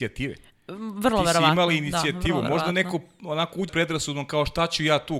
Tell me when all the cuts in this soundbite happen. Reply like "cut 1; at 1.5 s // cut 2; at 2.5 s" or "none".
cut 1; at 3.7 s